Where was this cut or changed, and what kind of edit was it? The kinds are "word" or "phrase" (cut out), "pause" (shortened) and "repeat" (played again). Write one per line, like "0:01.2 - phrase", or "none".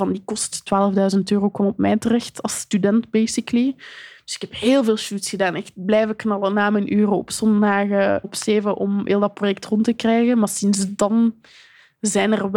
0:08.2 - word